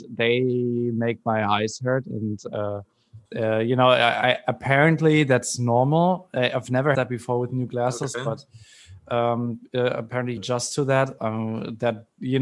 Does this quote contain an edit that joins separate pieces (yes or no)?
yes